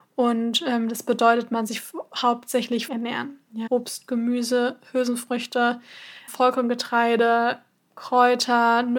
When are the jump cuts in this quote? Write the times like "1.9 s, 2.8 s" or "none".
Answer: 1.7 s, 2.9 s, 3.7 s, 6.3 s